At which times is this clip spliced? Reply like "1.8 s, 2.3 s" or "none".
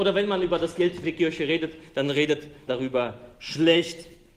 1.0 s, 2.7 s